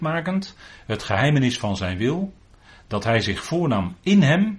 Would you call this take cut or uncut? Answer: uncut